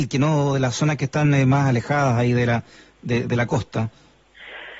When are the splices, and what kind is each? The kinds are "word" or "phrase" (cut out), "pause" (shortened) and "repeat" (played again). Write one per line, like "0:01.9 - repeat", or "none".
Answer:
none